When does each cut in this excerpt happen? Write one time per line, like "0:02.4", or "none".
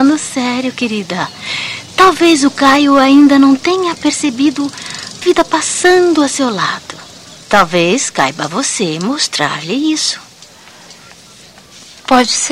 0:05.2
0:07.4